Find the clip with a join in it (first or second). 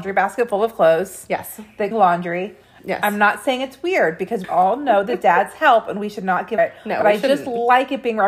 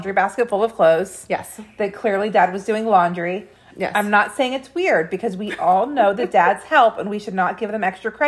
first